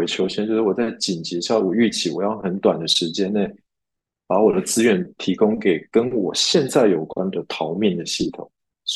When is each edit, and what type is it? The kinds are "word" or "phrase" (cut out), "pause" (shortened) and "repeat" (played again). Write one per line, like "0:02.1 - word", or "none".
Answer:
none